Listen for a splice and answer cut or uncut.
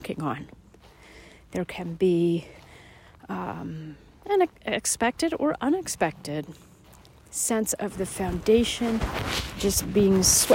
uncut